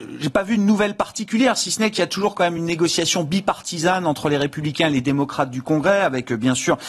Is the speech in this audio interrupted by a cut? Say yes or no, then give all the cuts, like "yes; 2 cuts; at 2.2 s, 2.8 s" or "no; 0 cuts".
no; 0 cuts